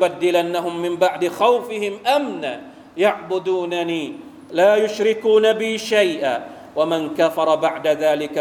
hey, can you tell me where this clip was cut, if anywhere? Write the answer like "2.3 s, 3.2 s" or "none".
none